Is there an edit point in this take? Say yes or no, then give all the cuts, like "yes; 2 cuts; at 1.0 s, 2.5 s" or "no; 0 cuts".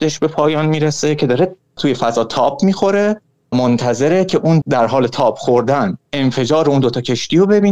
yes; 3 cuts; at 1.8 s, 3.5 s, 4.6 s